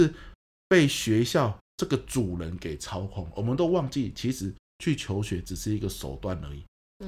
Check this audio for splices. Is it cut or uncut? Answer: cut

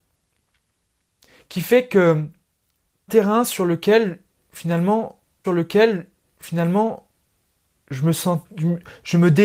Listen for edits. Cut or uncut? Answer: cut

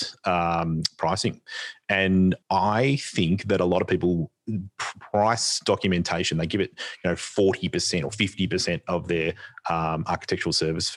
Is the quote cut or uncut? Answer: cut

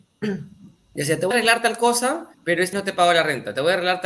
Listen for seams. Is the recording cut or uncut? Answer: cut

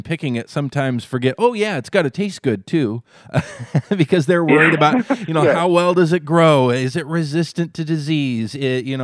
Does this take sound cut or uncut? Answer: uncut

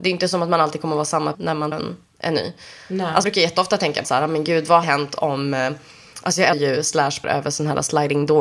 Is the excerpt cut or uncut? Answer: cut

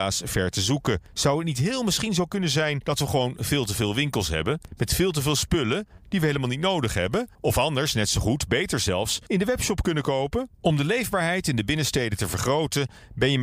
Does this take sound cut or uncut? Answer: cut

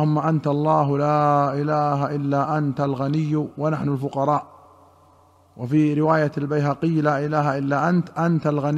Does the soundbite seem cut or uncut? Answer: uncut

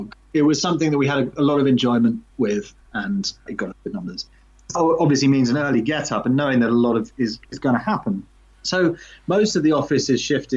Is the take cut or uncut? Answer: cut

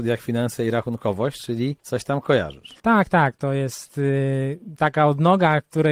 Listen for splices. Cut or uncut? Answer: cut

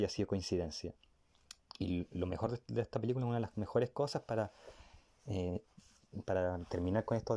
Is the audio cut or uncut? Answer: uncut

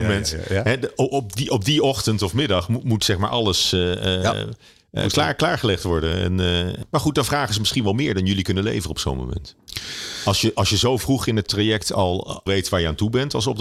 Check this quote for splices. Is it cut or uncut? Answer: cut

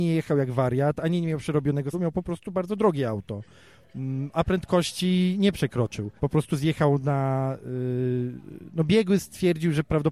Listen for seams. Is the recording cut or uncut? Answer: cut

